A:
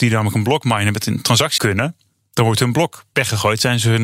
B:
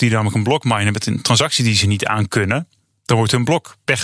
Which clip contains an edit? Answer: A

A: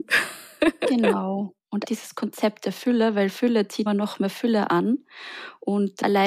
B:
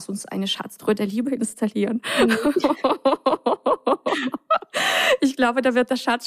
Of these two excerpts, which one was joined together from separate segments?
A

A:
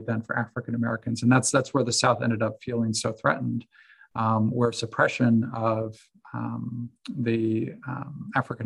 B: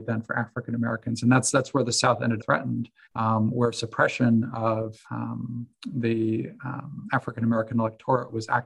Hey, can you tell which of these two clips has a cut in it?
B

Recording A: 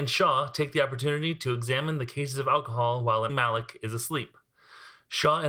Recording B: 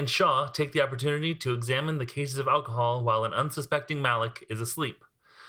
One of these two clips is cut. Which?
A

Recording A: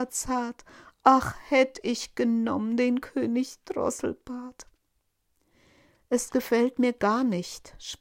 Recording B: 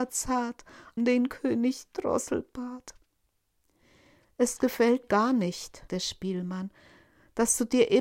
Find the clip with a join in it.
B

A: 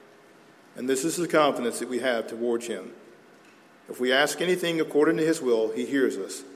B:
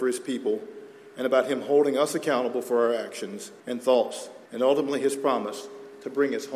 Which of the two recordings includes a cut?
B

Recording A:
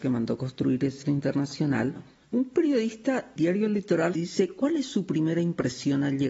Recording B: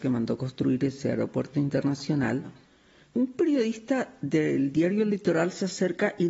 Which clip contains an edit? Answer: A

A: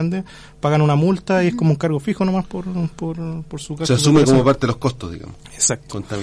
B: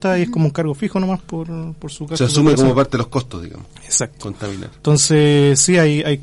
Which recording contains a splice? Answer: B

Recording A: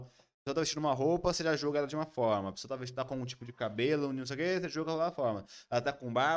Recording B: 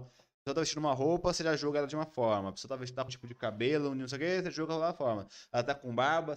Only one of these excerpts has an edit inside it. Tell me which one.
B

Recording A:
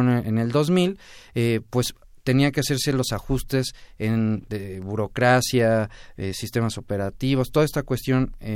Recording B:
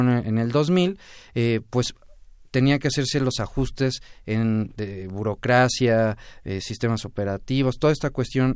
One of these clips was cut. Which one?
A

